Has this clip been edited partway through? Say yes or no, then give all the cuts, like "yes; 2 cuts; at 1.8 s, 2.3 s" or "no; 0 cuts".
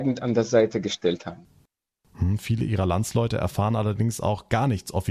no; 0 cuts